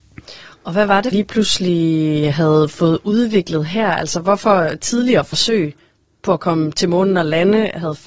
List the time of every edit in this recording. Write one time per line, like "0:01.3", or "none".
0:01.1